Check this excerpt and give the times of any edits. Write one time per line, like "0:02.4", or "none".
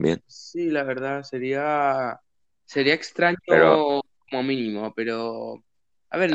none